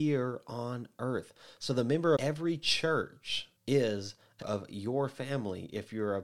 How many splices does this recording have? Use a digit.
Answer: 3